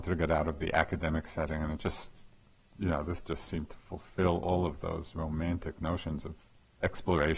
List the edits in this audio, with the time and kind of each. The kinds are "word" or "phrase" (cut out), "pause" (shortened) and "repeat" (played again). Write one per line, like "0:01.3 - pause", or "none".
none

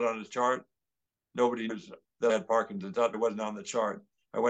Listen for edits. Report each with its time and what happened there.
0:01.7 - word
0:02.3 - word
0:03.1 - word

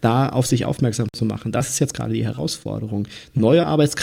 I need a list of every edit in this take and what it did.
none

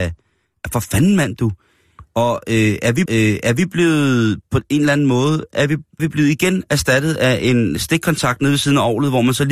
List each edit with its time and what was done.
0:03.1 - repeat
0:06.0 - word

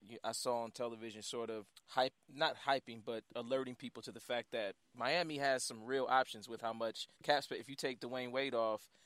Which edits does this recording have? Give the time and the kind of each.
0:01.7 - word
0:04.8 - pause
0:07.1 - pause

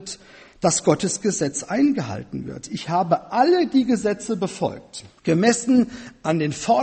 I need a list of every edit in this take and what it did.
0:05.2 - pause

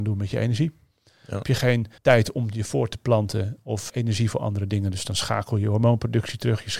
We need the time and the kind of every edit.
0:01.4 - word
0:02.0 - pause
0:03.9 - word

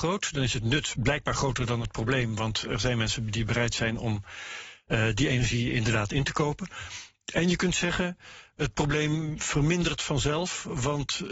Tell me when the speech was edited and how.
none

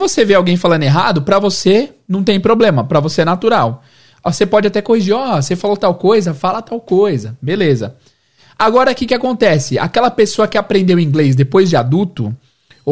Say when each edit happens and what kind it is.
none

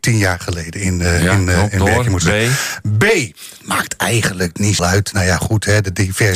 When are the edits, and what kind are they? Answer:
0:04.8 - phrase

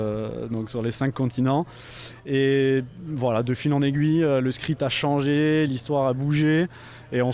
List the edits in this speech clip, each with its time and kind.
none

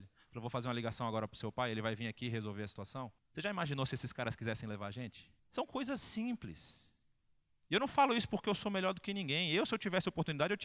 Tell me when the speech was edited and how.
0:03.2 - pause
0:05.4 - pause

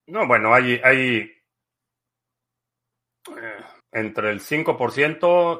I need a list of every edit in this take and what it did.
0:03.8 - pause

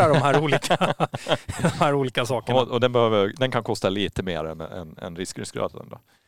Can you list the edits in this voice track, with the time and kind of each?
none

